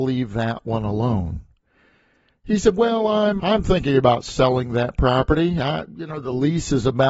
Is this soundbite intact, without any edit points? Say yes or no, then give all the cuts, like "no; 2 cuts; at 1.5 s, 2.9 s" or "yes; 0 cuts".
no; 1 cut; at 3.4 s